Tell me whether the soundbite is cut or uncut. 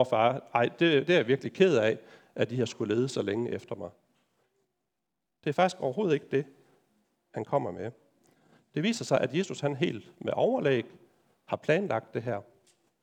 uncut